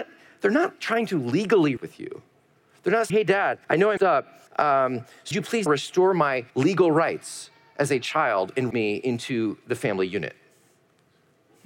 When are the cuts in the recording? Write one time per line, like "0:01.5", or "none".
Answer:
0:01.8
0:03.1
0:03.6
0:04.0
0:04.5
0:05.3
0:05.7
0:06.5
0:08.7